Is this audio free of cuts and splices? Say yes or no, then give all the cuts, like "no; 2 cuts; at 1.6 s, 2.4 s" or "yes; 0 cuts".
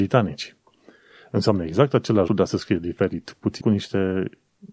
no; 2 cuts; at 2.3 s, 3.6 s